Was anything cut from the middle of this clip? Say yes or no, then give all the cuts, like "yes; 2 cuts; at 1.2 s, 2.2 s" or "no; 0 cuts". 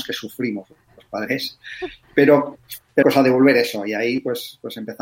yes; 1 cut; at 3.0 s